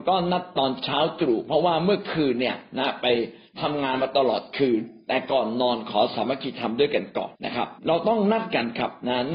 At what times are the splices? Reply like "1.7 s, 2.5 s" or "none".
7.3 s, 7.8 s